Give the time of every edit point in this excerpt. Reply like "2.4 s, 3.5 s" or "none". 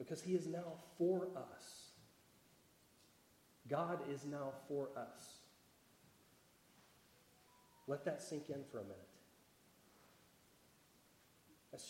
none